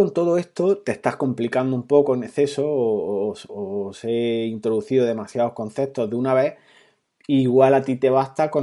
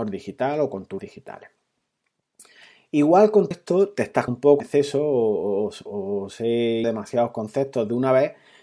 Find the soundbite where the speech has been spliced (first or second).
second